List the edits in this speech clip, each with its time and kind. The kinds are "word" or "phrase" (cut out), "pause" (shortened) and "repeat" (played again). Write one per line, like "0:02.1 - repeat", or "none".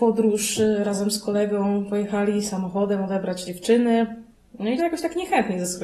0:03.4 - word
0:04.8 - word